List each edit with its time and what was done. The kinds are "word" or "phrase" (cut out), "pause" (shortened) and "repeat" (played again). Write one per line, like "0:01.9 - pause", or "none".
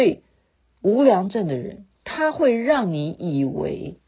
0:01.9 - pause